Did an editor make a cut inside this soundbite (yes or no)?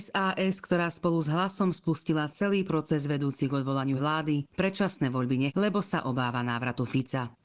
yes